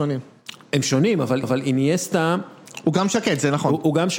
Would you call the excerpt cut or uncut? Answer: cut